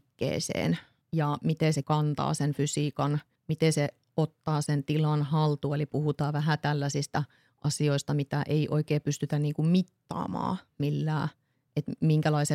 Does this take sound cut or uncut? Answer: cut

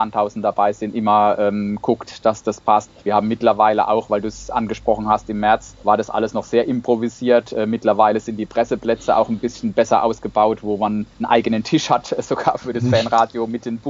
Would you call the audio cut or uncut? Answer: cut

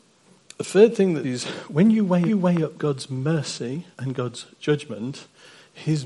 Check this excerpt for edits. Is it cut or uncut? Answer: cut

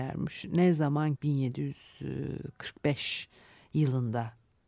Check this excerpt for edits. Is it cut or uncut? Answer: cut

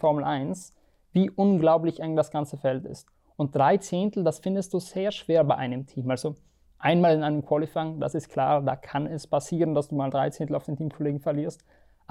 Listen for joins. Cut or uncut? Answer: uncut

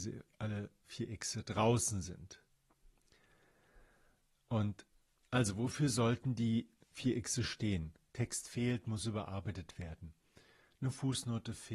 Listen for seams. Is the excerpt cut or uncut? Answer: uncut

